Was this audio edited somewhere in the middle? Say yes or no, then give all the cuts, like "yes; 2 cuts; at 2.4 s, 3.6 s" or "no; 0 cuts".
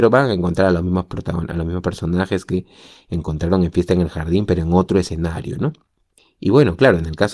no; 0 cuts